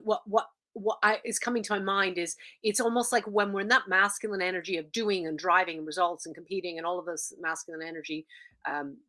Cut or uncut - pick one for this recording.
uncut